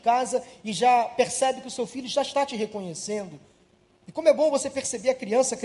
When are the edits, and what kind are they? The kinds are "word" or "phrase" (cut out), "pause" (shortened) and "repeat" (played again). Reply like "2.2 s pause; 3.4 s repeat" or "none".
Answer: none